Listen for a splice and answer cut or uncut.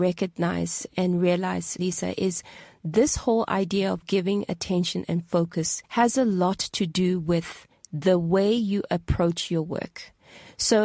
cut